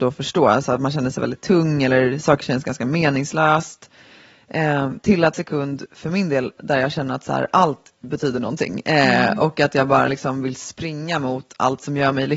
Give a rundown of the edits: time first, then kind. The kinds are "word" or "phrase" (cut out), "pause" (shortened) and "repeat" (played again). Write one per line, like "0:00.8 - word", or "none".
0:05.3 - phrase